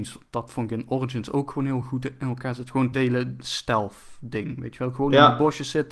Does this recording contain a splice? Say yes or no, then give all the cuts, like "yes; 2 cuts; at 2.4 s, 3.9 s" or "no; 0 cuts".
no; 0 cuts